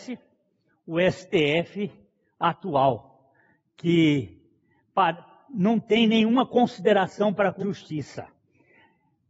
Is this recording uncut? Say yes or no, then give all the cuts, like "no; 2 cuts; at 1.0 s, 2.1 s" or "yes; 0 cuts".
no; 1 cut; at 7.6 s